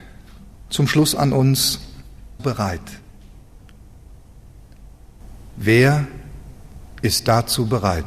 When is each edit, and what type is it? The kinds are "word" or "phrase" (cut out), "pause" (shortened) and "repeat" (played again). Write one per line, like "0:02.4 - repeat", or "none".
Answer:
0:02.4 - phrase